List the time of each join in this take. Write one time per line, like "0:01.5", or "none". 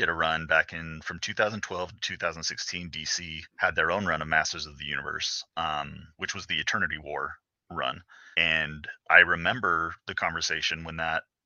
0:03.5
0:06.1
0:08.3